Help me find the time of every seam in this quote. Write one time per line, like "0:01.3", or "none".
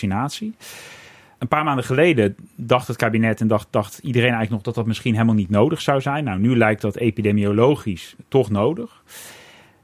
none